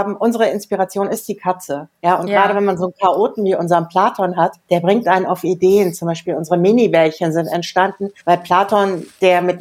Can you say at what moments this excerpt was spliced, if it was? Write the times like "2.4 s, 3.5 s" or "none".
2.0 s, 4.6 s, 8.2 s